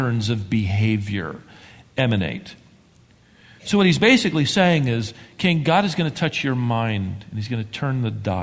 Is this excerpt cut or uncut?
uncut